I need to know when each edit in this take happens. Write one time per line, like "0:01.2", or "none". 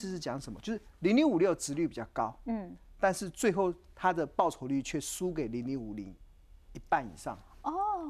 none